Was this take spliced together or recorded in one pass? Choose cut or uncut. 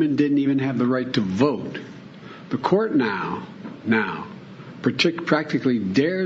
uncut